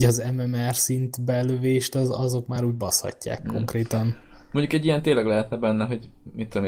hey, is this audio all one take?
yes; 0 cuts

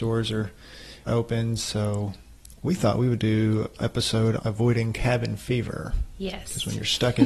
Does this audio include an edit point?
yes; 4 cuts; at 1.1 s, 2.6 s, 3.8 s, 4.4 s

